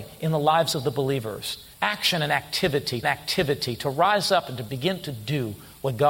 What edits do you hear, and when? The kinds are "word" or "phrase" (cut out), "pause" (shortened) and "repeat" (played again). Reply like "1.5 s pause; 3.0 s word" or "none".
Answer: 1.7 s pause; 3.0 s repeat